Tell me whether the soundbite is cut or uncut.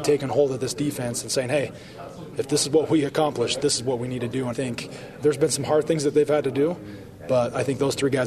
cut